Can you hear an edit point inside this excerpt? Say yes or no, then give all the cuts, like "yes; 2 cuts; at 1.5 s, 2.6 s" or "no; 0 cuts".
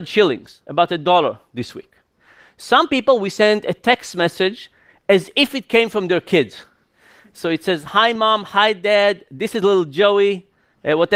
no; 0 cuts